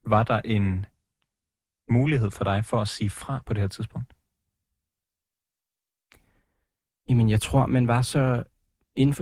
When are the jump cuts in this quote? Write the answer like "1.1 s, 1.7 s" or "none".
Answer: none